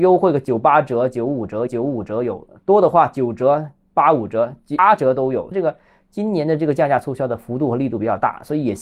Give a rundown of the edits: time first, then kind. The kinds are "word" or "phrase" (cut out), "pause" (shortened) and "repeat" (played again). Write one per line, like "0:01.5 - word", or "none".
0:01.7 - repeat
0:05.5 - phrase